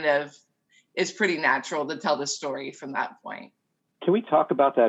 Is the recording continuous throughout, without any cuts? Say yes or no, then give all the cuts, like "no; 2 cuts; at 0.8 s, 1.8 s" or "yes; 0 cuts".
yes; 0 cuts